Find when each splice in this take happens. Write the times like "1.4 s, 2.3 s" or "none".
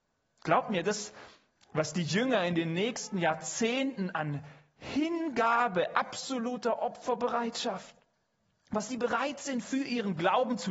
none